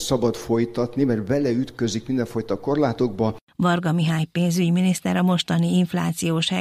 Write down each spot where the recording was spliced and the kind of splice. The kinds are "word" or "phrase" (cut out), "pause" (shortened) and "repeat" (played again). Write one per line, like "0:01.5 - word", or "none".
none